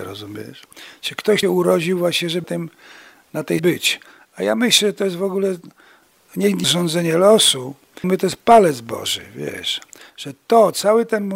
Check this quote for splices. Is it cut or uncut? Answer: cut